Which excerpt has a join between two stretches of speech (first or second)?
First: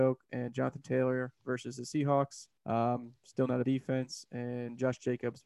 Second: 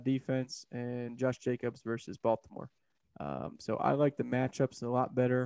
first